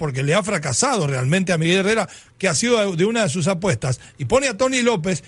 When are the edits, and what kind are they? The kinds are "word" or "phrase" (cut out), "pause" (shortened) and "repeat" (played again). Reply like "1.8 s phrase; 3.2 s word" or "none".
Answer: none